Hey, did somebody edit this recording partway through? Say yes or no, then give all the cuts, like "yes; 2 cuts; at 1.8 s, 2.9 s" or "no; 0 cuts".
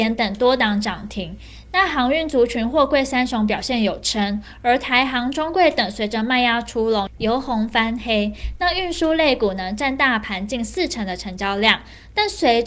no; 0 cuts